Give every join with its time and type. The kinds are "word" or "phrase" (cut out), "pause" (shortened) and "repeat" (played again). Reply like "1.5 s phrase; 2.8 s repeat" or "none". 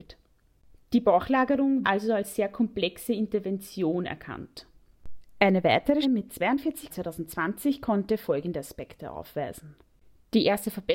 1.8 s phrase; 6.0 s word; 6.9 s phrase